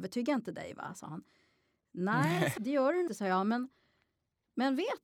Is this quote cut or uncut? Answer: cut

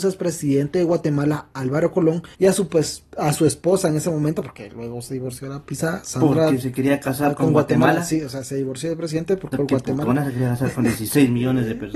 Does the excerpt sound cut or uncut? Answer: cut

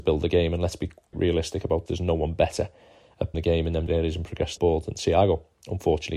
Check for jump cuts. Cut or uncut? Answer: cut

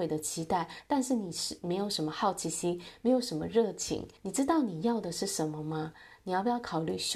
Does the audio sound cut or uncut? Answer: cut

